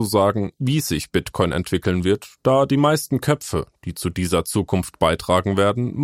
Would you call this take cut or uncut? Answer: uncut